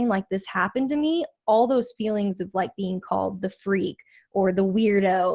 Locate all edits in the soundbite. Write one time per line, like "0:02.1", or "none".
none